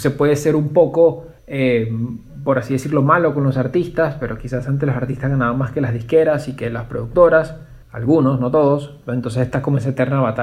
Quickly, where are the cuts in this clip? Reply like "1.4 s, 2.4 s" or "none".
1.4 s, 7.8 s